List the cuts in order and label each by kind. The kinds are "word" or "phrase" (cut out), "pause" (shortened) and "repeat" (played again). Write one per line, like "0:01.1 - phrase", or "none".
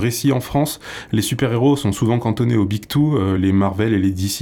none